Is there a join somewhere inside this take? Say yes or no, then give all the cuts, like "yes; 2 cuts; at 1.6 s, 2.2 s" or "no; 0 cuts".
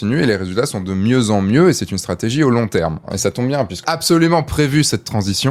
yes; 1 cut; at 3.8 s